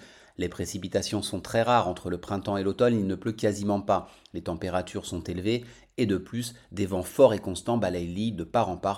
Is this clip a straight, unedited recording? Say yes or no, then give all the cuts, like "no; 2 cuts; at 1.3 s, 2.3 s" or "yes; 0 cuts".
yes; 0 cuts